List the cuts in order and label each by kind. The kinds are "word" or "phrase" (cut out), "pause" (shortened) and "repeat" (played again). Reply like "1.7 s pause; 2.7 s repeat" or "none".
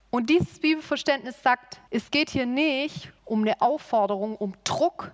1.9 s pause; 3.2 s pause